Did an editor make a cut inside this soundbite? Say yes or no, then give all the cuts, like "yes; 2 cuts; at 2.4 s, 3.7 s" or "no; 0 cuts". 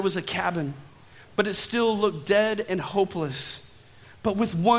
no; 0 cuts